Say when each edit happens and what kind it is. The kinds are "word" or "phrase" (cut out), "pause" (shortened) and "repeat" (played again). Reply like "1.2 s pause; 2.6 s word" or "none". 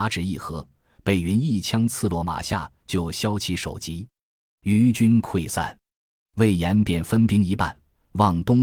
none